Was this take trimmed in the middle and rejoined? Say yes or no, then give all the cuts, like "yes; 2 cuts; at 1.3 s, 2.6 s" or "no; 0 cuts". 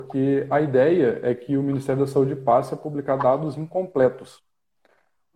no; 0 cuts